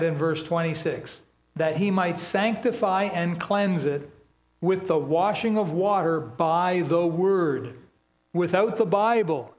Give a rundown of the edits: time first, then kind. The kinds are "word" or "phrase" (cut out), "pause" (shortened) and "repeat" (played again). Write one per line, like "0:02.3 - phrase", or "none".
none